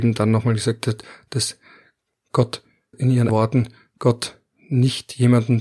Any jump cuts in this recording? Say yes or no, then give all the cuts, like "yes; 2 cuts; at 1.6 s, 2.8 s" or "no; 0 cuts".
yes; 2 cuts; at 2.9 s, 3.3 s